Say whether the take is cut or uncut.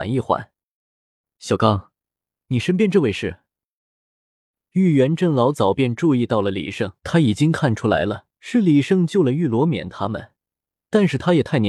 cut